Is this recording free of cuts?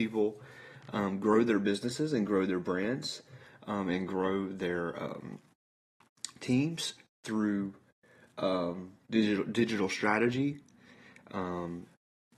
yes; 0 cuts

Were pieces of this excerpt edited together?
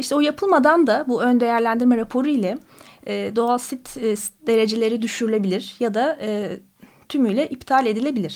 no; 0 cuts

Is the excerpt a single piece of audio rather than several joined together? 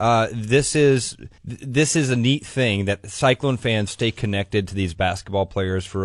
no; 2 cuts; at 1.4 s, 3.9 s

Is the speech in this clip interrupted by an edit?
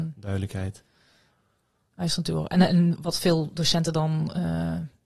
no; 0 cuts

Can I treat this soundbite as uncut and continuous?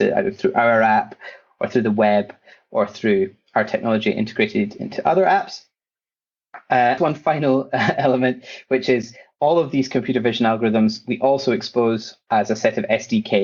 no; 1 cut; at 7.0 s

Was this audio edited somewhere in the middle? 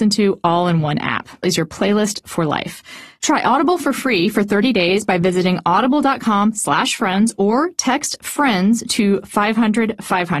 yes; 1 cut; at 1.4 s

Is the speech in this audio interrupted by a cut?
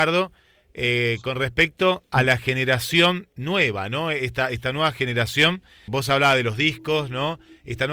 yes; 1 cut; at 5.9 s

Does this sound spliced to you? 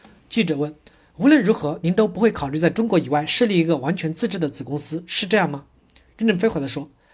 no; 0 cuts

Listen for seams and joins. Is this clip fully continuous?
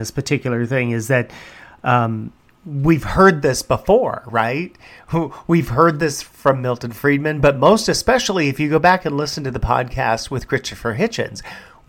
no; 1 cut; at 2.4 s

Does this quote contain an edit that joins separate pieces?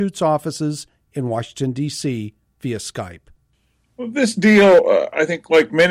no; 0 cuts

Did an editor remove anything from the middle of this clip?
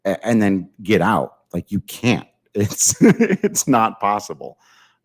no; 0 cuts

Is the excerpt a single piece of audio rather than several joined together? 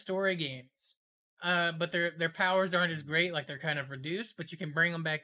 yes; 0 cuts

